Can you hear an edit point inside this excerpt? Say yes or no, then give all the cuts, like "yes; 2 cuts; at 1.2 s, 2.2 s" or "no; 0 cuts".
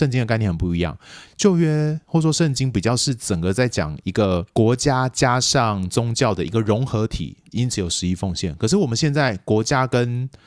yes; 2 cuts; at 4.5 s, 7.5 s